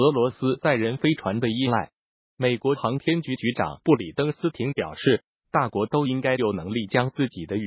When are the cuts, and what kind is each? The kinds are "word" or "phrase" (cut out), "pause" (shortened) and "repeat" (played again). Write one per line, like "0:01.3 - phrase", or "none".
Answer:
none